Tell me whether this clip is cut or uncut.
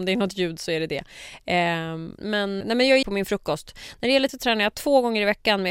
cut